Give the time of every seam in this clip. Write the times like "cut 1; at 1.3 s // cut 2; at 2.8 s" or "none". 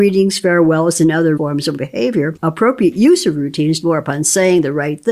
cut 1; at 1.4 s // cut 2; at 1.8 s // cut 3; at 3.8 s